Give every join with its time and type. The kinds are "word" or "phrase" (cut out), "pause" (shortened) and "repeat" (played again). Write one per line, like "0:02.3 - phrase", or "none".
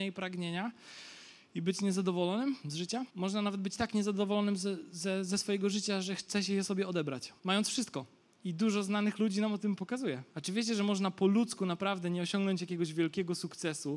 0:03.1 - pause
0:07.4 - pause
0:08.2 - pause
0:10.3 - pause

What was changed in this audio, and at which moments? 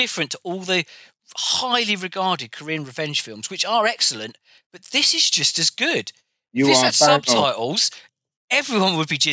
none

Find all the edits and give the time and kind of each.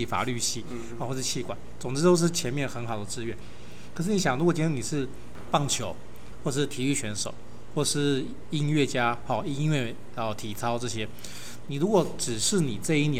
none

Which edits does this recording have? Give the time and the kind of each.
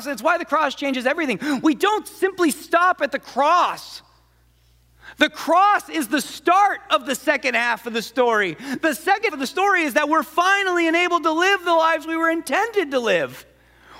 0:09.3 - word

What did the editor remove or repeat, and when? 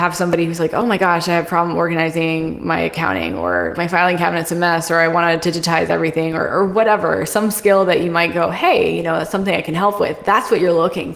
0:03.7 - word

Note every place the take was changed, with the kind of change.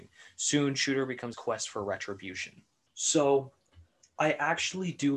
0:01.3 - phrase
0:02.9 - pause

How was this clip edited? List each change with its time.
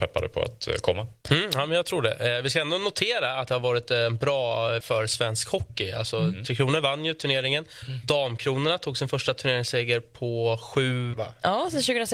0:04.8 - word
0:11.1 - word

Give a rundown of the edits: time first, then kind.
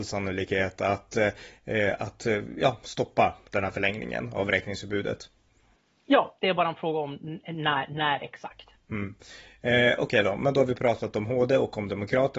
none

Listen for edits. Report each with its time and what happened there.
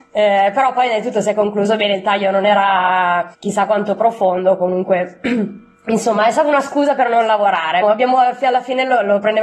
0:03.3 - pause
0:07.8 - word

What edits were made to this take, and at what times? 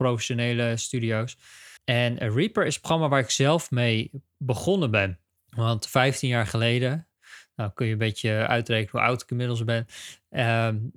0:01.8 - pause
0:05.4 - pause

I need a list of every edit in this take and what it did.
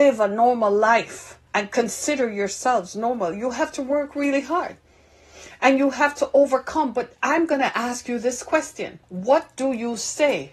0:01.5 - pause
0:09.0 - pause

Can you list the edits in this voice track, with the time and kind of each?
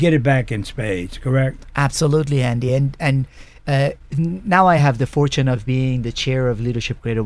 none

